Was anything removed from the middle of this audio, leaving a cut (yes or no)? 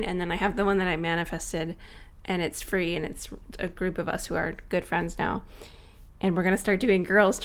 yes